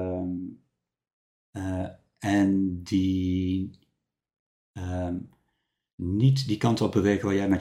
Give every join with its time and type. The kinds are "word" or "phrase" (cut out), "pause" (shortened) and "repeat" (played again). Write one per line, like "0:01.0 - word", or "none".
none